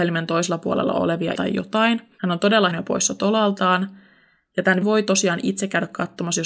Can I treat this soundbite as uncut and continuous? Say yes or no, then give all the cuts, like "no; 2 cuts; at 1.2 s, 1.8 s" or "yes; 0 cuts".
no; 3 cuts; at 1.3 s, 2.7 s, 4.8 s